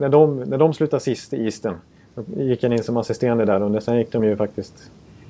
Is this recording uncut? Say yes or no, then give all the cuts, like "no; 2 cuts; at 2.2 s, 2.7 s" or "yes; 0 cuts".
yes; 0 cuts